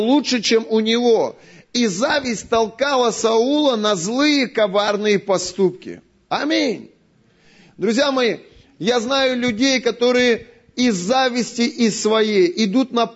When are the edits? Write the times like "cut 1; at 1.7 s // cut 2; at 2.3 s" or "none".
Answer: none